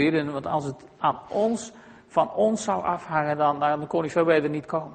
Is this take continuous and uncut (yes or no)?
yes